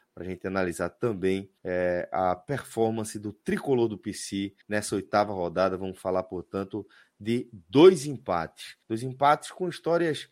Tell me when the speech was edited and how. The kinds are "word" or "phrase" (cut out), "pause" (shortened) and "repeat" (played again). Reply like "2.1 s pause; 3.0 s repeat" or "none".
1.6 s pause; 4.6 s pause; 8.8 s pause